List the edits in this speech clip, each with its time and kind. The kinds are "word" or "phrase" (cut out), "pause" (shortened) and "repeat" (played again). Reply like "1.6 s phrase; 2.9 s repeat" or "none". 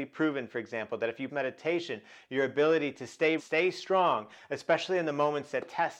1.3 s word; 3.4 s word

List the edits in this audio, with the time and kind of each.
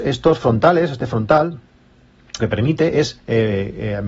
2.4 s word

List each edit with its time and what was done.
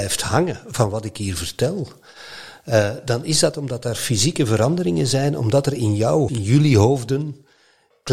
6.3 s word

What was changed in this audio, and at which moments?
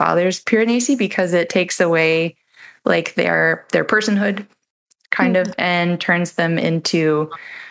none

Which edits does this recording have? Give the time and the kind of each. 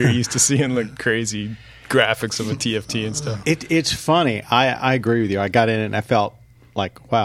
none

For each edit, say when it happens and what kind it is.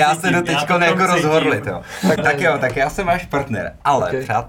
2.2 s word

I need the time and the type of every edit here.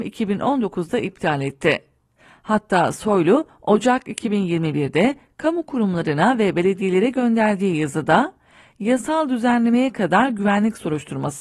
none

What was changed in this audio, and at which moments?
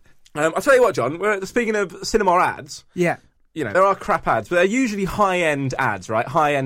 3.4 s pause; 3.7 s word

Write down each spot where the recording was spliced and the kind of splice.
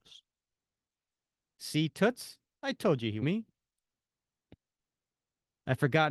3.2 s phrase

